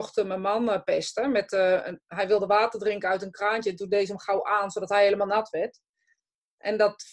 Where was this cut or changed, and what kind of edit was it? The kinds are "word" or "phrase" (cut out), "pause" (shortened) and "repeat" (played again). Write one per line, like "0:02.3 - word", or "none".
none